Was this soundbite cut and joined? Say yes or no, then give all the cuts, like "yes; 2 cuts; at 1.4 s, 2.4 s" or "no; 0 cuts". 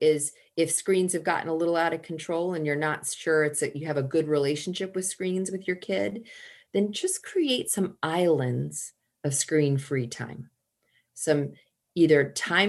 no; 0 cuts